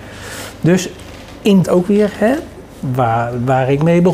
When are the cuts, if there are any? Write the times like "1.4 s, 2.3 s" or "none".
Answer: 1.6 s

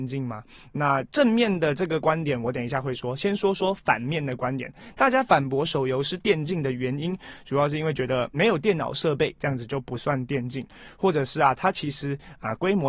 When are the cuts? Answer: 8.3 s

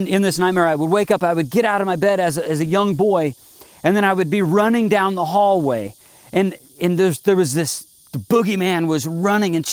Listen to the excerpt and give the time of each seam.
none

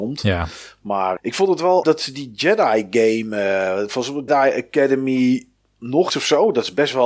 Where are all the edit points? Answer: 1.2 s, 1.8 s, 4.3 s, 6.1 s

